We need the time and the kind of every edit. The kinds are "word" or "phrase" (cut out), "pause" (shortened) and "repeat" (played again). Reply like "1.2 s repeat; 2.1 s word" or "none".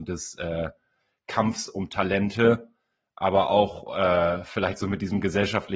none